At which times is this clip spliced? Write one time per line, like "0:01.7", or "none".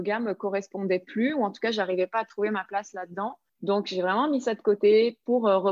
0:03.5